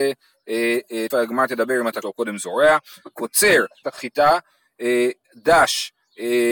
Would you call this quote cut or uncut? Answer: cut